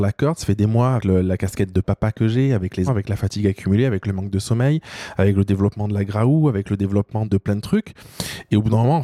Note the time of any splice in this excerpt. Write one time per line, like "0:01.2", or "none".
0:01.0
0:02.9
0:07.3